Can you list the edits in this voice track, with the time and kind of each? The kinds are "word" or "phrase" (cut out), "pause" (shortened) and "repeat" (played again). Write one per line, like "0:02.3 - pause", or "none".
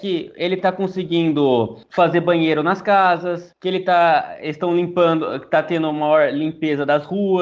none